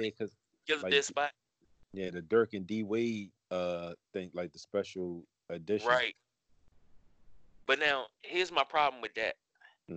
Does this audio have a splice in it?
no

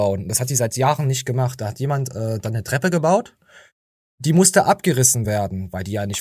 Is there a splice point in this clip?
no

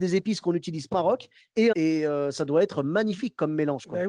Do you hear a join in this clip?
yes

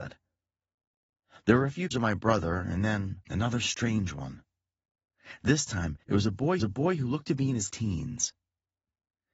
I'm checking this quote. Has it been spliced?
yes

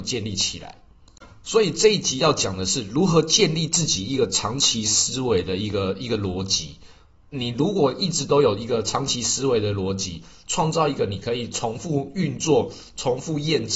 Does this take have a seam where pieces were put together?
no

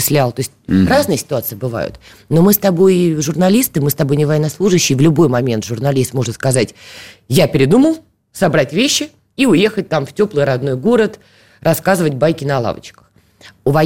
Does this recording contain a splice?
no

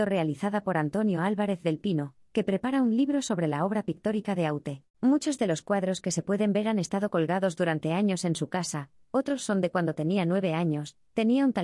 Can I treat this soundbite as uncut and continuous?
no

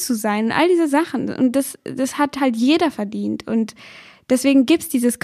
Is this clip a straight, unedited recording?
yes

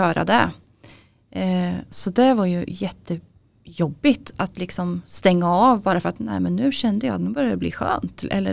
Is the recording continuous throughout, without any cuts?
yes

